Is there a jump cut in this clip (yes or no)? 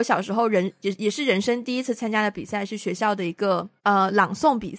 yes